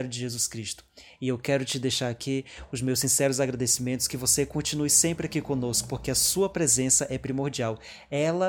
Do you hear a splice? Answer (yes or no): no